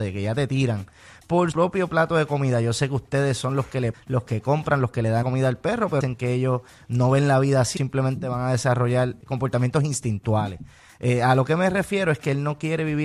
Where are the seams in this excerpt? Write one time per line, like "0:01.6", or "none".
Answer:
0:01.5
0:03.9
0:05.2
0:06.0
0:07.8
0:09.2